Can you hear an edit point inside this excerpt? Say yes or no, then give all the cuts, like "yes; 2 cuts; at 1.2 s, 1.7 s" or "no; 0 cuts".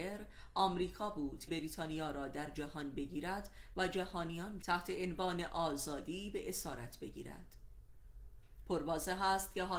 yes; 2 cuts; at 1.5 s, 4.6 s